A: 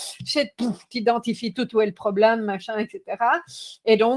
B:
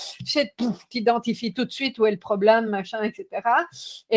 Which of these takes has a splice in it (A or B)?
A